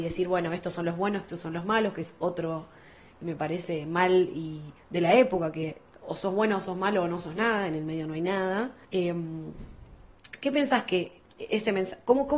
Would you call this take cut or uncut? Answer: cut